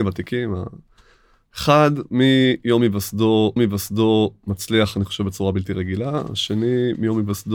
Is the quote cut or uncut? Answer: cut